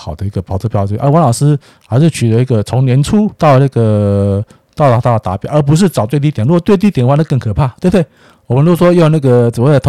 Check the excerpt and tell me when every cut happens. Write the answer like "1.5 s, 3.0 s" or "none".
3.4 s